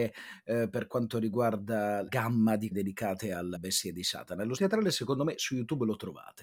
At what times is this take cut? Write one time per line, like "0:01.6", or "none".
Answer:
0:02.1
0:02.7
0:03.5
0:04.6